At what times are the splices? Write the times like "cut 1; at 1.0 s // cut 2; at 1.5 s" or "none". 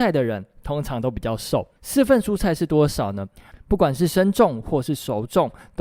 cut 1; at 1.8 s